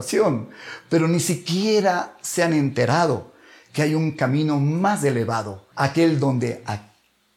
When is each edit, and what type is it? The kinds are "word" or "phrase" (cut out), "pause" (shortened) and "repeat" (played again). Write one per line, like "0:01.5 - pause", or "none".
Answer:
0:05.7 - pause